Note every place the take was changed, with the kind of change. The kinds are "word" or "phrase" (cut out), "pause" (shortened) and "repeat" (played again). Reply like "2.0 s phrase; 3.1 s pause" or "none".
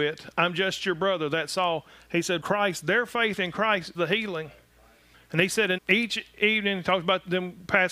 2.4 s word; 3.9 s word; 5.8 s word